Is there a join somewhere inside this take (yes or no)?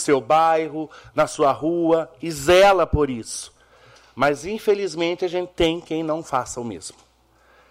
no